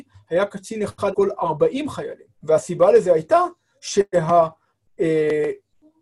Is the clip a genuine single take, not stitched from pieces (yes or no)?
no